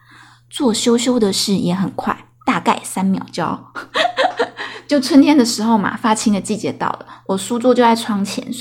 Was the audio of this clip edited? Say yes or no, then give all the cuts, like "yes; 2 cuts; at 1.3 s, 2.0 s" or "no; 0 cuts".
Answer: no; 0 cuts